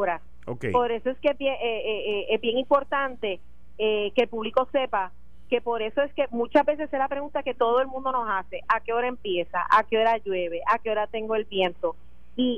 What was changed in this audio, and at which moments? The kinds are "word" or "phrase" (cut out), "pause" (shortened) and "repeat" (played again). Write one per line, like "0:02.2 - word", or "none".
none